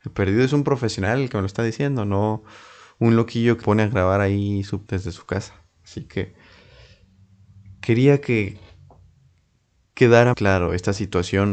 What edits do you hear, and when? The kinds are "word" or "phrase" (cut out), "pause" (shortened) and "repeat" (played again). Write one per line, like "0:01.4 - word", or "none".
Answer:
0:03.6 - word
0:04.9 - word
0:10.3 - word